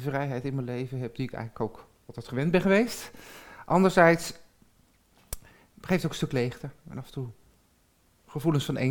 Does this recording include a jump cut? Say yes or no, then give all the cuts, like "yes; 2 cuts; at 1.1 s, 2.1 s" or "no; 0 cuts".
no; 0 cuts